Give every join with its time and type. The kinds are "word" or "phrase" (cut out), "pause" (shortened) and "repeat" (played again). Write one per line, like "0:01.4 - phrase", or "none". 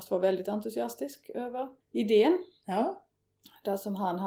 0:01.8 - pause